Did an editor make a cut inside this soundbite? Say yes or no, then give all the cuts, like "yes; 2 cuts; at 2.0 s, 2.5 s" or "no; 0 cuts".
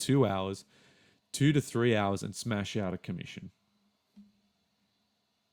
no; 0 cuts